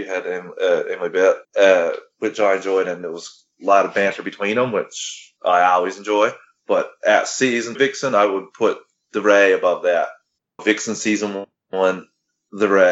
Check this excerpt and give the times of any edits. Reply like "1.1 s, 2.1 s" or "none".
1.4 s, 3.5 s, 5.4 s, 7.8 s, 10.6 s